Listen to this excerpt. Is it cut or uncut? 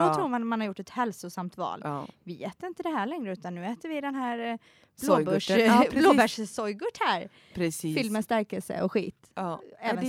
uncut